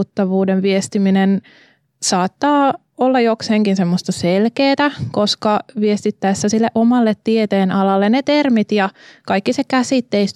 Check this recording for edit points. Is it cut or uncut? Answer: uncut